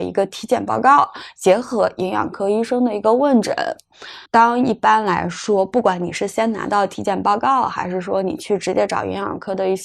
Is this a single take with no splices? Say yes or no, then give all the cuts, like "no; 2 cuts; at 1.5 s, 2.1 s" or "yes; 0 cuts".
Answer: no; 1 cut; at 4.3 s